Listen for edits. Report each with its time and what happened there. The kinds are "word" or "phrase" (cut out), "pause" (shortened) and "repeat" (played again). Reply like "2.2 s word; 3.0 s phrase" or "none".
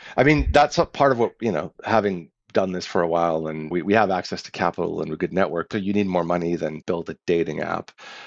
3.7 s word; 5.7 s word; 6.8 s word